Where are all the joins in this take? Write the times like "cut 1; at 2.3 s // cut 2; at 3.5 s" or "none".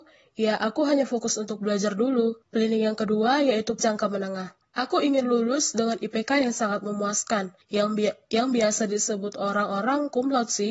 cut 1; at 2.4 s // cut 2; at 3.8 s // cut 3; at 4.6 s // cut 4; at 7.6 s